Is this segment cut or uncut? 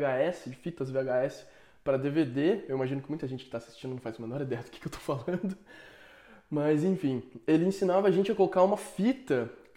uncut